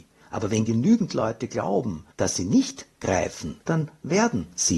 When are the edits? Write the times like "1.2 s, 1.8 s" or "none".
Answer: 3.6 s